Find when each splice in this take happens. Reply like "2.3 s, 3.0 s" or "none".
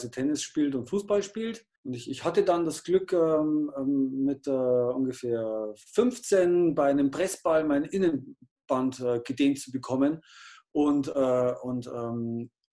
1.8 s